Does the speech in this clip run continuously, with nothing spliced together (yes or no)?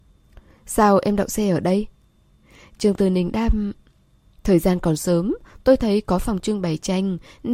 yes